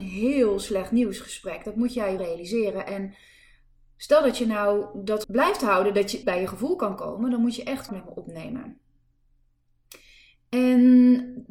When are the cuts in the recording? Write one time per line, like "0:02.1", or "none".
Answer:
0:02.2
0:05.2
0:06.2
0:07.9

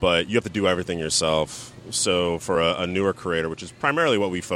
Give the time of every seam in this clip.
none

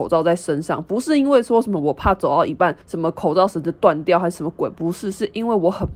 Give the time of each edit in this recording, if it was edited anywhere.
0:02.8

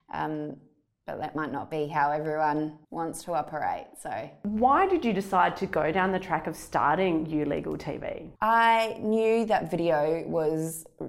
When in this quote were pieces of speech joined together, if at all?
0:02.8
0:08.4

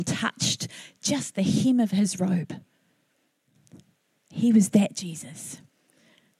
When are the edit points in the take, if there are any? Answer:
none

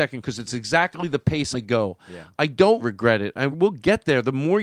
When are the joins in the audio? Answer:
0:01.5
0:02.8
0:03.5

